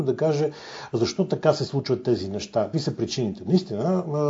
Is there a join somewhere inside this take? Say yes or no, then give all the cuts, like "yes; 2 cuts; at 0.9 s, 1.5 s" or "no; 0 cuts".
yes; 1 cut; at 2.7 s